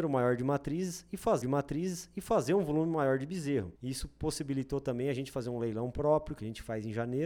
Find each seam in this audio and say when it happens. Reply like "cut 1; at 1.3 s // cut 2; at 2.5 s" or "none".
cut 1; at 1.4 s // cut 2; at 3.8 s